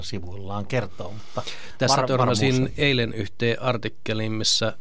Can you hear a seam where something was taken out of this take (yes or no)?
no